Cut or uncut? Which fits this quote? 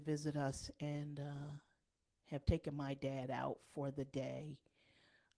uncut